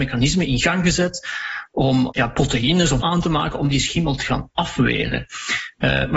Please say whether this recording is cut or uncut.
cut